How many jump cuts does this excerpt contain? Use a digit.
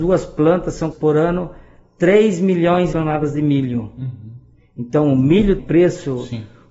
3